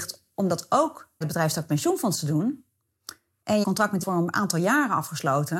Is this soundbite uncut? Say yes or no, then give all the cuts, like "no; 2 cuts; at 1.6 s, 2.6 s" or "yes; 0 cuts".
no; 3 cuts; at 1.2 s, 3.6 s, 4.0 s